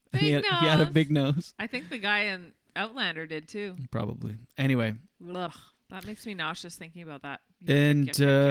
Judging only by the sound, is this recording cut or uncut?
uncut